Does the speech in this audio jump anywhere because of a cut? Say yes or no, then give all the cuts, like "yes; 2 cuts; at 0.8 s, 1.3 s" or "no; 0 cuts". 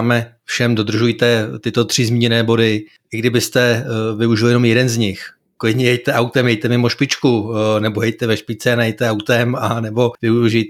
no; 0 cuts